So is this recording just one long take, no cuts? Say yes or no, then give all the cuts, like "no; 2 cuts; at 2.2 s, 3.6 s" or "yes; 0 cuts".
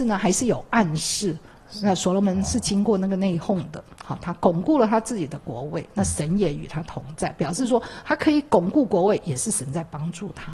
yes; 0 cuts